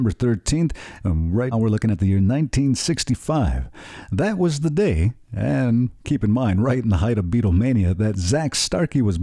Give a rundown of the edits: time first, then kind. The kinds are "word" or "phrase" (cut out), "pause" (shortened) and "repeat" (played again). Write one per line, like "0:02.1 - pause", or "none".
0:01.5 - word
0:06.0 - pause